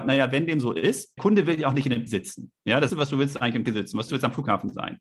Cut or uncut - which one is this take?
cut